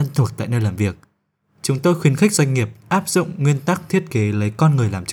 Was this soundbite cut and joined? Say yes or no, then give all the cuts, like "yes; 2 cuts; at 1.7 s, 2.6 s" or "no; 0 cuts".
no; 0 cuts